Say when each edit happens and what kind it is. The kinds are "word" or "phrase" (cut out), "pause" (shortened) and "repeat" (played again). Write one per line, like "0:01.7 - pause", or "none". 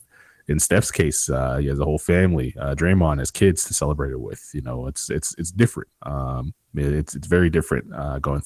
0:06.6 - pause